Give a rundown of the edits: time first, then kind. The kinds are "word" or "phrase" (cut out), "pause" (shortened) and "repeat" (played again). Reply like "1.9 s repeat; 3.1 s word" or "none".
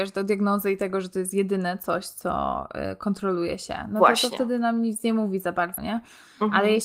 5.8 s word